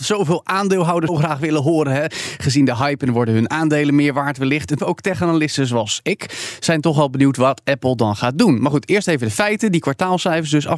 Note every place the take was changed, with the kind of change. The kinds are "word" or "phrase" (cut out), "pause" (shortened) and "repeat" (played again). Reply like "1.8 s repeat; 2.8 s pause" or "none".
1.1 s word; 4.8 s word